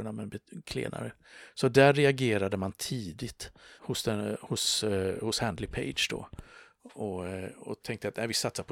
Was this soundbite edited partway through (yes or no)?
yes